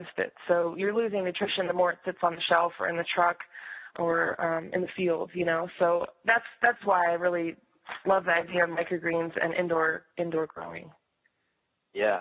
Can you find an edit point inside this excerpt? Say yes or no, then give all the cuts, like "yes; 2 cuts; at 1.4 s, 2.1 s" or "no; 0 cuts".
yes; 1 cut; at 10.1 s